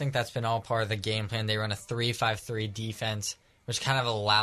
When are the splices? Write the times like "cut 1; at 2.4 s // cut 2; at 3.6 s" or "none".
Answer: none